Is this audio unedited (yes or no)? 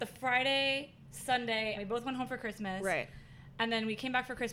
no